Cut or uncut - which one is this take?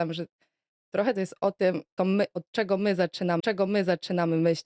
cut